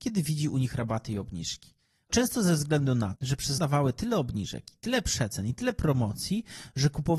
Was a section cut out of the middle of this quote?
yes; 3 cuts; at 2.1 s, 3.2 s, 3.6 s

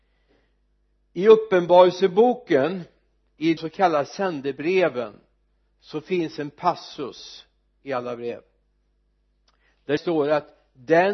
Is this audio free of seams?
no; 2 cuts; at 3.6 s, 10.0 s

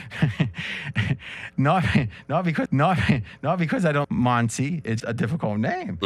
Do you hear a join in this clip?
yes; 3 cuts; at 2.7 s, 4.0 s, 5.0 s

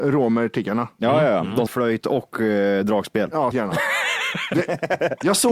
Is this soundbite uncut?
no; 2 cuts; at 1.7 s, 3.5 s

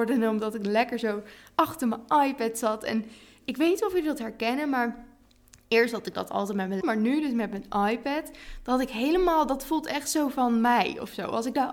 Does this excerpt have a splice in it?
yes; 1 cut; at 6.8 s

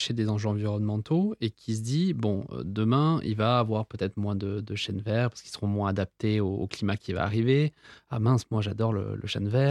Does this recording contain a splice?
no; 0 cuts

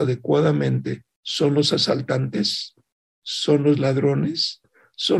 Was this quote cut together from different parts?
no; 0 cuts

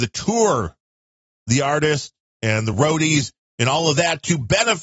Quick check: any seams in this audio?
no; 0 cuts

